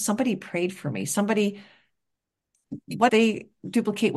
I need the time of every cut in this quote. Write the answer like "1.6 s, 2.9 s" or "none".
3.1 s